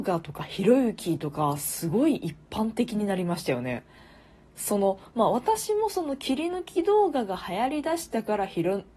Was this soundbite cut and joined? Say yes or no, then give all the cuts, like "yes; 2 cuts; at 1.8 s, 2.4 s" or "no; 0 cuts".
no; 0 cuts